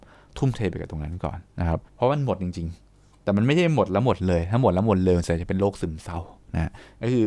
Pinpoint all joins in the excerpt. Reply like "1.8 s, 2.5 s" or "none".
1.9 s